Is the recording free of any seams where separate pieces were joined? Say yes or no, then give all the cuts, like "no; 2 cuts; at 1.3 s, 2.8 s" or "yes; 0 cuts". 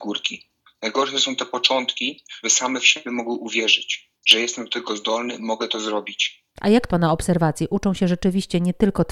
no; 3 cuts; at 2.4 s, 4.2 s, 6.9 s